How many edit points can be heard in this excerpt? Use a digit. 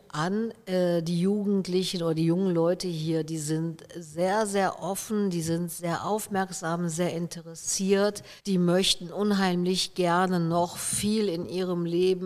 1